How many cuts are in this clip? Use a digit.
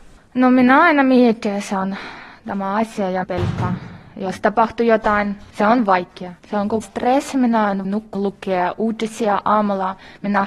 6